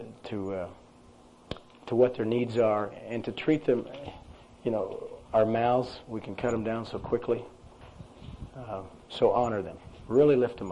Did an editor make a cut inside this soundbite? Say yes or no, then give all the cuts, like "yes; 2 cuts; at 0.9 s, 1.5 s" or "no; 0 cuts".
no; 0 cuts